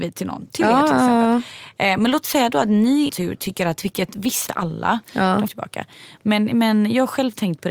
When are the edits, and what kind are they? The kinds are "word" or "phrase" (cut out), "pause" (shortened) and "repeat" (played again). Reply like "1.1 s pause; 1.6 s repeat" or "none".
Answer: 3.1 s word; 3.8 s phrase; 4.5 s phrase; 5.5 s phrase